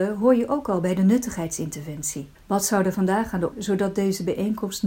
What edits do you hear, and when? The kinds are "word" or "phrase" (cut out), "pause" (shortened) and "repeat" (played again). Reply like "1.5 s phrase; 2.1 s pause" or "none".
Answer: 2.3 s pause; 3.5 s phrase